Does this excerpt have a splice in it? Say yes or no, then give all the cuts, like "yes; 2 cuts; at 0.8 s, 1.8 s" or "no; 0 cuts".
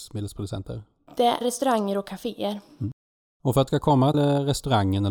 yes; 3 cuts; at 1.4 s, 3.7 s, 4.1 s